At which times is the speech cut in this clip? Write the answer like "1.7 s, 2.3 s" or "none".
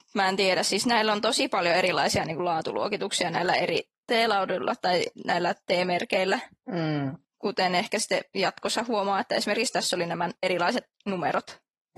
10.4 s